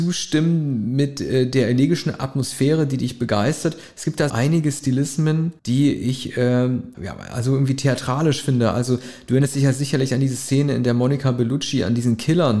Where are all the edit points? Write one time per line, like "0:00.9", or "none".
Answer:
0:04.3
0:05.6
0:06.9